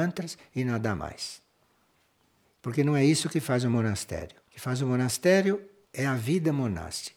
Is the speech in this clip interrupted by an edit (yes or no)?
yes